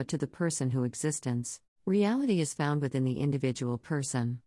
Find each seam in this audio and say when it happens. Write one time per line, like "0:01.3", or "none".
0:01.7

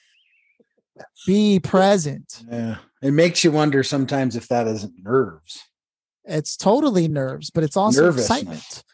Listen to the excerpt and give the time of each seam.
none

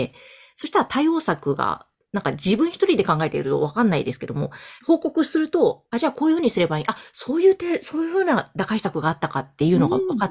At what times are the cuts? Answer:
0:04.8

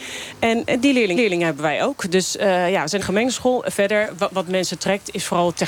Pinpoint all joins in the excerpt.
0:01.2
0:03.0

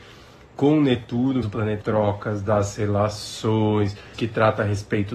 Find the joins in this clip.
0:01.4
0:01.8
0:04.1

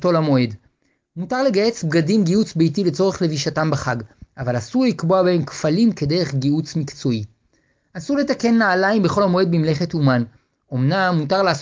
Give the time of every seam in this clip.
none

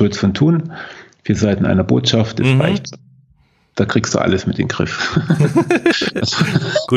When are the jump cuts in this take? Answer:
none

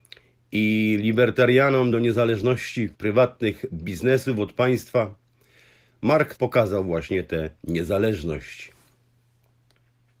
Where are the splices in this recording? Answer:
0:01.9
0:02.9
0:06.3
0:07.6

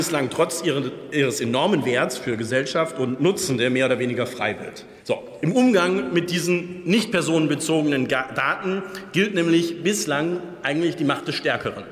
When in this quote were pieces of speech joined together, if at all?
0:05.0

